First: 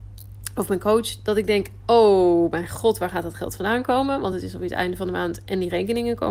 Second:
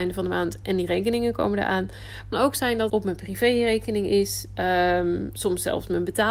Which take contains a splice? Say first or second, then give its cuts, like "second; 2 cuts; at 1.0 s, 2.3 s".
second; 2 cuts; at 2.3 s, 2.9 s